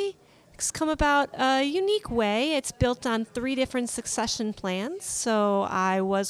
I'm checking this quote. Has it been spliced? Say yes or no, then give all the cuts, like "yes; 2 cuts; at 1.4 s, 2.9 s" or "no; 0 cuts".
no; 0 cuts